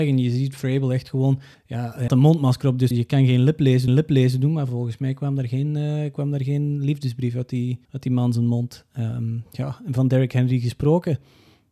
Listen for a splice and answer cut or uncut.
cut